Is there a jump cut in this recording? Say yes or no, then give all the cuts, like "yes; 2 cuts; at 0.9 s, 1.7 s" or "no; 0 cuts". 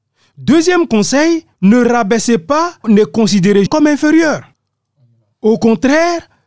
yes; 3 cuts; at 1.5 s, 2.8 s, 3.7 s